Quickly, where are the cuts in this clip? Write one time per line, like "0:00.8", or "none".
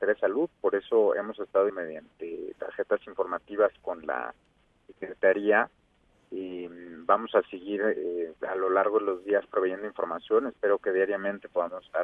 0:01.7
0:08.4